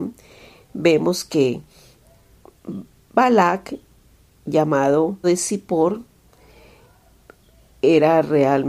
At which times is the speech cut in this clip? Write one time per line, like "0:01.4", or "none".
0:05.2